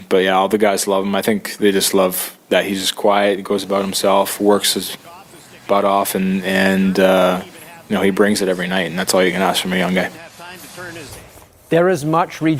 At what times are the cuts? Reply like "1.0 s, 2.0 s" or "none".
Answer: 2.4 s